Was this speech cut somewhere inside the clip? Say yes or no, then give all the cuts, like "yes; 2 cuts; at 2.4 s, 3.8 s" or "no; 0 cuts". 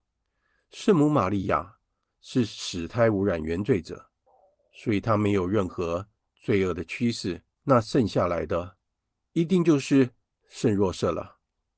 yes; 1 cut; at 7.5 s